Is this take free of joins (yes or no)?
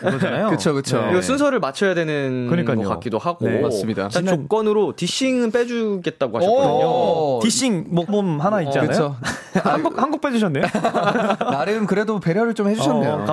no